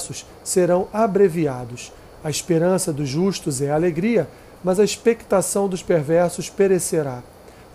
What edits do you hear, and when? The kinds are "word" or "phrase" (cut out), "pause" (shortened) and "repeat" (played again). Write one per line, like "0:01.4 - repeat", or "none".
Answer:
none